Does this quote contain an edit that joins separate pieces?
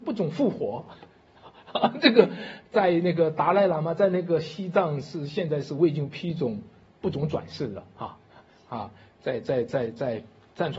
no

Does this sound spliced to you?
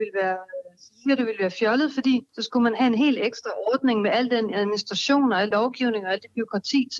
yes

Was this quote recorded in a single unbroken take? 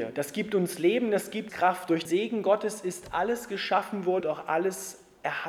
no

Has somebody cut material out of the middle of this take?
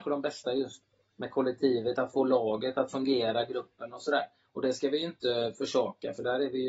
no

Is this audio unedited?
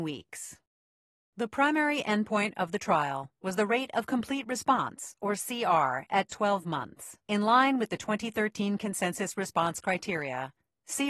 no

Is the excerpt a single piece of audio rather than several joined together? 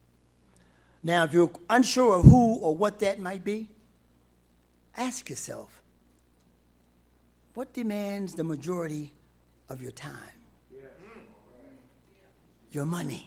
yes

